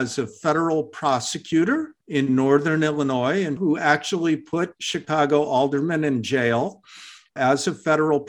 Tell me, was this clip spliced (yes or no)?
yes